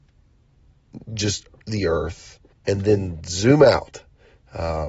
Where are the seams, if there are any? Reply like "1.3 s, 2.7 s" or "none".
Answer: 2.5 s